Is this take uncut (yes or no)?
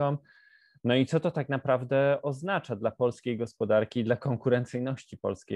yes